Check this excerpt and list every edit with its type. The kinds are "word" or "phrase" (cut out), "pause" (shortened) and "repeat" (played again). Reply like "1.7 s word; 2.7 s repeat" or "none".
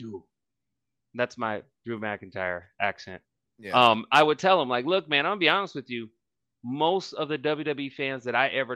none